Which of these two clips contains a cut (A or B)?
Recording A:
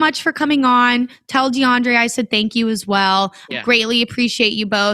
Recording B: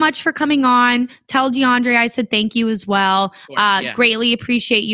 A